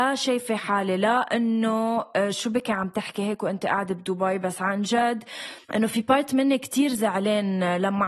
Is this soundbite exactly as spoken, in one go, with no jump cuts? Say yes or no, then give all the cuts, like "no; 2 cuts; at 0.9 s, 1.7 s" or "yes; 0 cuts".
no; 1 cut; at 5.6 s